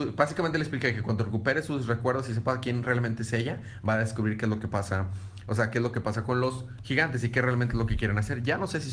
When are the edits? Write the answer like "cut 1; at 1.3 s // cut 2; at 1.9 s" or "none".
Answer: none